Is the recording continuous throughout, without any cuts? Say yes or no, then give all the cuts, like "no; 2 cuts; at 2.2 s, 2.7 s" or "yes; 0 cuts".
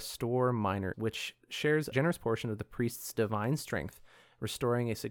no; 2 cuts; at 0.9 s, 1.9 s